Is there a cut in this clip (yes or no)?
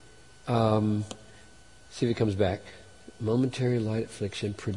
no